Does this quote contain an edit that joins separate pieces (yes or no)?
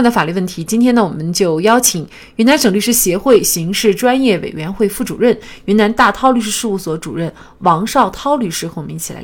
no